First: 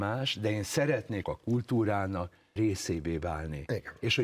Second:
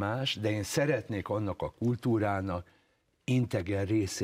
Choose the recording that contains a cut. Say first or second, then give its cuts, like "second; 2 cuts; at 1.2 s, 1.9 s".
first; 2 cuts; at 1.2 s, 2.6 s